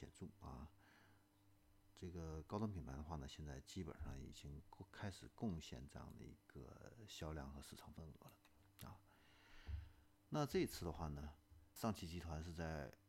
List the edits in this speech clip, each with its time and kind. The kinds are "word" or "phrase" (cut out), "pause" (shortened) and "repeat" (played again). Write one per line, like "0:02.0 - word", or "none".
0:11.8 - word